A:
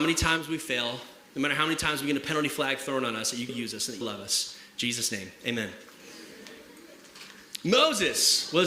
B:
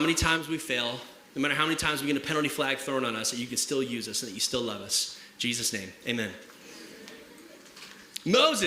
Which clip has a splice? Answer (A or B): A